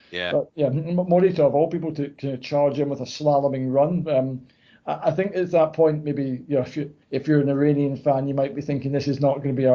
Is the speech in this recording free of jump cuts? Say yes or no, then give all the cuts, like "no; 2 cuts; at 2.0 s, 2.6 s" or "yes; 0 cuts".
no; 1 cut; at 7.0 s